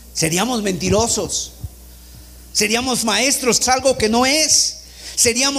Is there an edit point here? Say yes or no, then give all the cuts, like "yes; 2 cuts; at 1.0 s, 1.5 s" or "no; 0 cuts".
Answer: yes; 2 cuts; at 3.0 s, 3.6 s